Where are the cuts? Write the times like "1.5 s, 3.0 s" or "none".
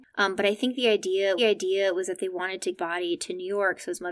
1.4 s, 2.7 s